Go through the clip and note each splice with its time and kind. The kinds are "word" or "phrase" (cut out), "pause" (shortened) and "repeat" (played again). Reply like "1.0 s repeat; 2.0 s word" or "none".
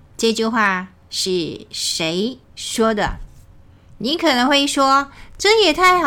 2.4 s pause